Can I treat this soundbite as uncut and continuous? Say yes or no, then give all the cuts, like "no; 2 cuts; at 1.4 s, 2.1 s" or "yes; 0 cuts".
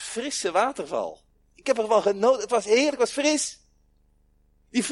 yes; 0 cuts